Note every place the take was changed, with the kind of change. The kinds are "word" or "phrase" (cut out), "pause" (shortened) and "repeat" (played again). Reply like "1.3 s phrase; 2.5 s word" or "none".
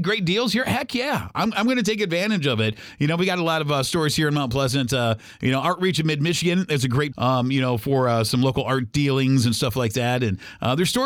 7.1 s phrase